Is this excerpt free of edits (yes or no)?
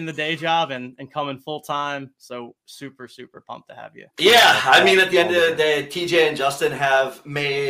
no